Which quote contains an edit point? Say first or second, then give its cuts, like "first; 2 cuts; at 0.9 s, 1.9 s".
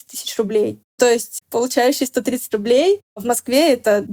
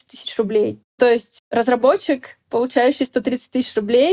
first; 2 cuts; at 1.4 s, 2.5 s